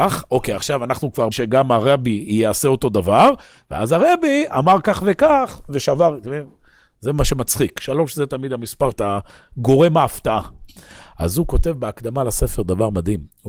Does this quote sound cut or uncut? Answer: cut